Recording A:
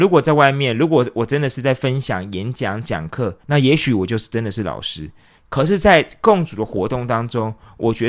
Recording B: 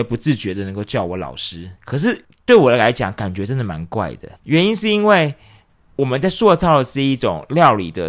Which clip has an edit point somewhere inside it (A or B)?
B